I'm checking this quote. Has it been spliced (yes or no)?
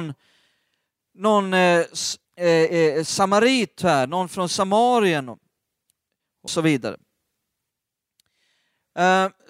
yes